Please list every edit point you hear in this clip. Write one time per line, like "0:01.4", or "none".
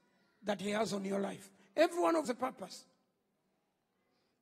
0:02.3